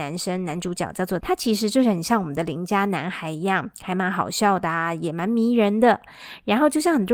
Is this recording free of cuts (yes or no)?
no